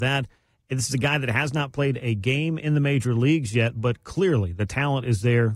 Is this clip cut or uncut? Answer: uncut